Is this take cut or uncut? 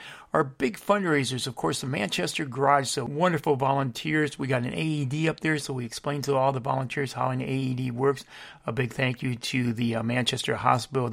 uncut